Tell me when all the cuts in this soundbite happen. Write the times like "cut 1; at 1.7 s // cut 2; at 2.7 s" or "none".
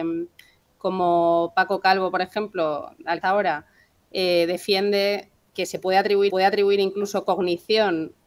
cut 1; at 3.2 s // cut 2; at 5.5 s // cut 3; at 6.3 s